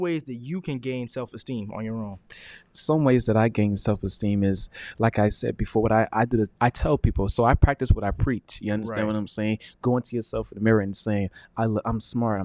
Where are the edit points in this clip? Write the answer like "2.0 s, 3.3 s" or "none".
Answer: 6.6 s